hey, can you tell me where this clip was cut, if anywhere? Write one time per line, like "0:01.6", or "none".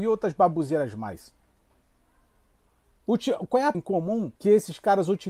0:03.7
0:04.4

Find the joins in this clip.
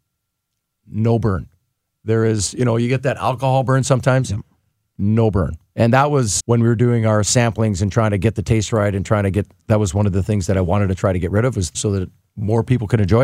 0:06.4
0:11.7

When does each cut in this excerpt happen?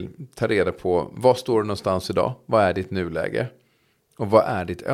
none

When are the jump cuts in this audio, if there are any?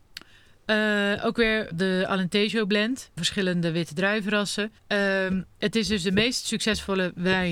0:01.7
0:03.2
0:04.8

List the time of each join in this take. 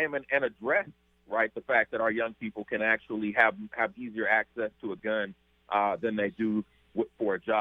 none

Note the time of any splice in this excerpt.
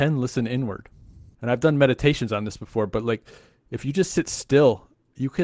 0:01.3

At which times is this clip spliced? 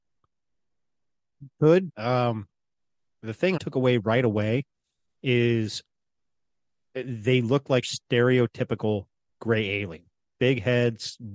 0:01.9
0:03.6
0:07.8

